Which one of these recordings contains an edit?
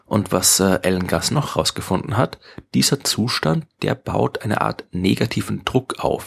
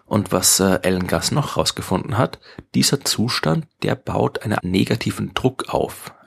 second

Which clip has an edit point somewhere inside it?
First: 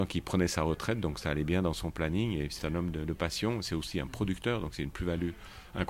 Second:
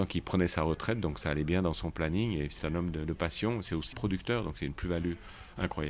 second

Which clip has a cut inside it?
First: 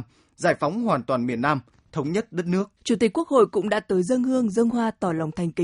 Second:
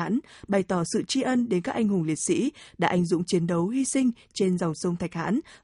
first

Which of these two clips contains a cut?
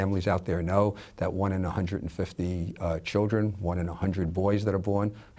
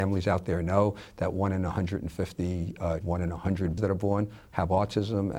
second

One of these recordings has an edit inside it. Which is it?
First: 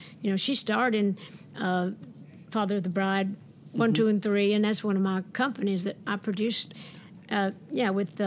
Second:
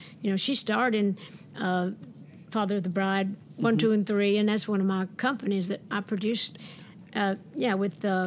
second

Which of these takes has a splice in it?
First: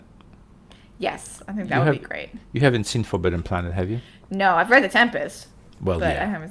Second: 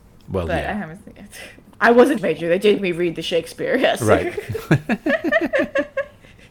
second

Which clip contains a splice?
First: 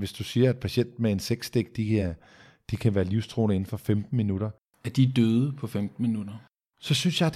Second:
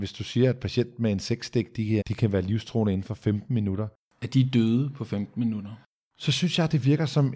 second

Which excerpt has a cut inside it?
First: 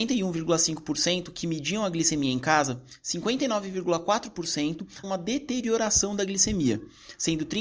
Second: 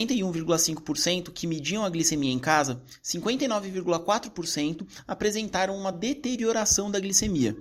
first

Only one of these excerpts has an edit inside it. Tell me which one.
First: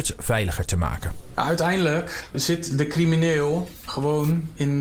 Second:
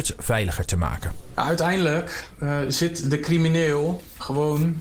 first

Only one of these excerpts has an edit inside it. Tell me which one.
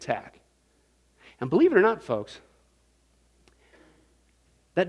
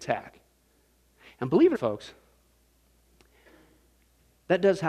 second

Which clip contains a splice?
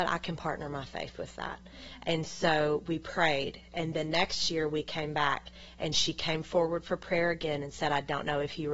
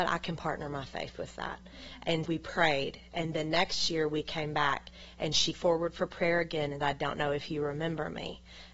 second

